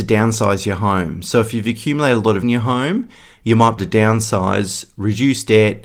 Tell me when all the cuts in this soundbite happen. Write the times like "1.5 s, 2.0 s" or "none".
2.4 s, 3.8 s